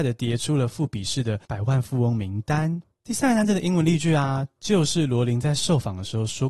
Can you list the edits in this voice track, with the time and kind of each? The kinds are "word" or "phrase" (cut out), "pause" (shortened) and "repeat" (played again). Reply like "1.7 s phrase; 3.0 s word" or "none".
1.4 s pause